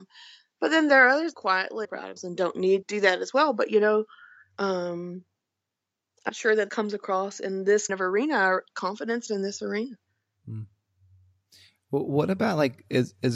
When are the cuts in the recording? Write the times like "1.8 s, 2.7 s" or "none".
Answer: 1.3 s, 1.8 s, 2.2 s, 2.8 s, 6.3 s, 6.7 s, 7.9 s, 9.3 s